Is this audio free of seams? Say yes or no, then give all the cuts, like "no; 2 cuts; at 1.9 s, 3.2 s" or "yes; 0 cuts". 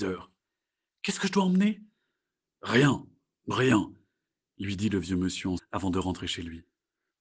no; 2 cuts; at 3.5 s, 5.6 s